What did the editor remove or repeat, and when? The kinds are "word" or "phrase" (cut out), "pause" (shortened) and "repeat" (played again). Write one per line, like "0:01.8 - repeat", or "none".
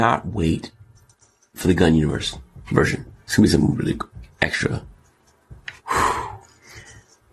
0:02.7 - phrase
0:03.2 - pause
0:03.7 - word
0:05.8 - pause

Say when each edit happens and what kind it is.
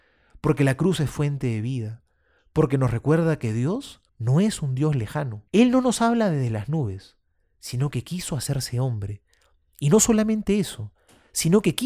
0:04.1 - pause
0:05.5 - pause

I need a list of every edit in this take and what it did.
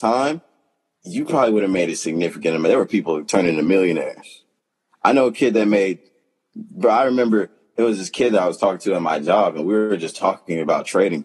none

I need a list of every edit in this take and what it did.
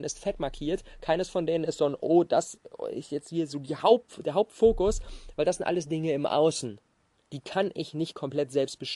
0:04.1 - pause
0:07.0 - pause

